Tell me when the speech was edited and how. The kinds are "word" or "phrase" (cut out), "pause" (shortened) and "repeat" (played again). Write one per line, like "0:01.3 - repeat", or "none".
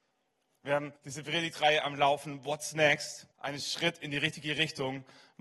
0:01.0 - pause
0:03.3 - pause

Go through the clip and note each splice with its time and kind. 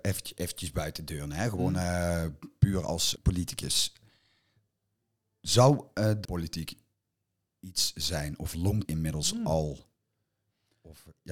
0:03.2 - word
0:06.2 - word
0:08.8 - word

